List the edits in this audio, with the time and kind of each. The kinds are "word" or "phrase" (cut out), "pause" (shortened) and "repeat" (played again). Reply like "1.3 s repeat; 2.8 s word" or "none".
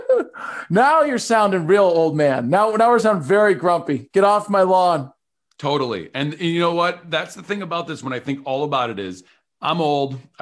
none